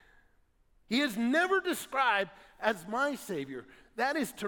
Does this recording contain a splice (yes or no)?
no